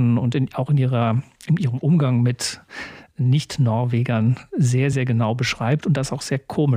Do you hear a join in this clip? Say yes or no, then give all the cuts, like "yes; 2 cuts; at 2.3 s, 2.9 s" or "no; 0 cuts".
no; 0 cuts